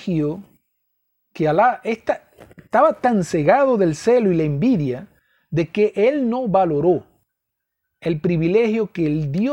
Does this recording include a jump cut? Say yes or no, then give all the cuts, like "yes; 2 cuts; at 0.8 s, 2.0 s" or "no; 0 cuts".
no; 0 cuts